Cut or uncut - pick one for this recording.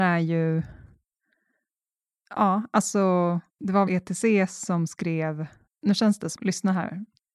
cut